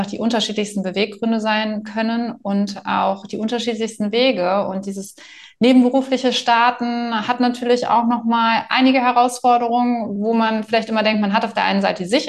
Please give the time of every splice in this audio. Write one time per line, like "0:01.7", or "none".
none